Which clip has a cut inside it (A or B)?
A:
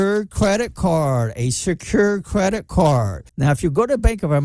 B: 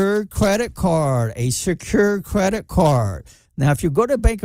A